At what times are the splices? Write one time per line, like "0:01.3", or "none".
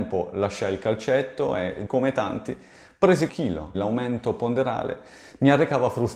0:01.9
0:03.3
0:03.7